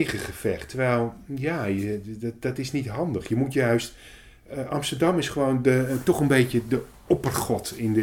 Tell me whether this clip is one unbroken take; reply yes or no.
yes